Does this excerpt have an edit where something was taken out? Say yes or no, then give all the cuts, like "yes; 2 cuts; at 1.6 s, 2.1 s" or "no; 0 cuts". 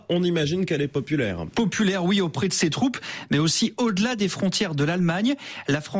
no; 0 cuts